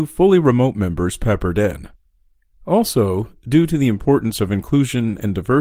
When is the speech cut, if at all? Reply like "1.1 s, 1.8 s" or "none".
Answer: none